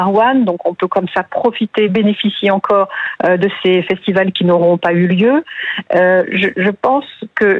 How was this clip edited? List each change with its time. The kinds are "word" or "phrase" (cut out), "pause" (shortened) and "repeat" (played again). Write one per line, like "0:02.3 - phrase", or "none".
none